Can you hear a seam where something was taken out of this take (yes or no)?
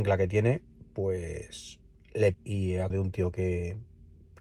yes